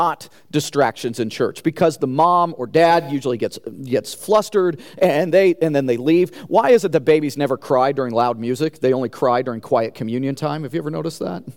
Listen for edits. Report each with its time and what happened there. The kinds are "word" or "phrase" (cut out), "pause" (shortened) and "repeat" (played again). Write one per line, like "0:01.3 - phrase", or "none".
none